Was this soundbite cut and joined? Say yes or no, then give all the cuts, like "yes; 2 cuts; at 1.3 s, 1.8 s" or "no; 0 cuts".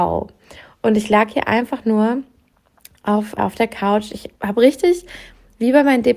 yes; 2 cuts; at 3.4 s, 4.4 s